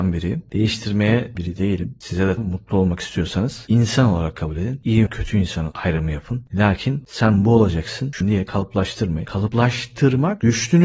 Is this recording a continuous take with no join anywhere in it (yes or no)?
no